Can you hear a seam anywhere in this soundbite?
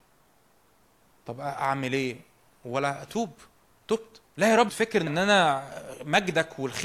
yes; 3 cuts; at 4.3 s, 4.7 s, 5.1 s

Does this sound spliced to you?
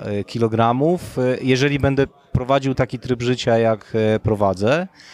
yes; 1 cut; at 2.7 s

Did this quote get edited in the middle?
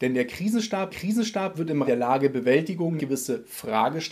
yes; 3 cuts; at 0.9 s, 1.9 s, 3.0 s

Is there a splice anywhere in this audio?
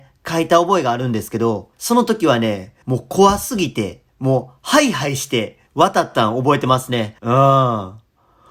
yes; 5 cuts; at 1.7 s, 2.8 s, 4.1 s, 5.7 s, 7.2 s

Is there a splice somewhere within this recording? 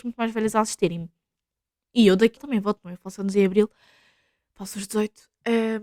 yes; 1 cut; at 2.4 s

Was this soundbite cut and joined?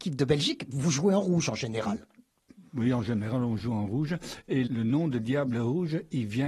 yes; 1 cut; at 4.7 s

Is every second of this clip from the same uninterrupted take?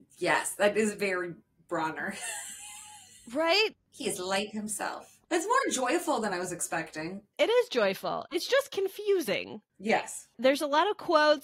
yes; 0 cuts

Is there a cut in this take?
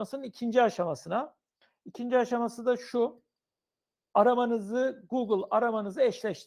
no; 0 cuts

